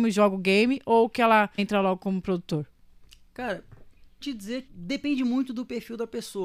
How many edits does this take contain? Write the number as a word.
three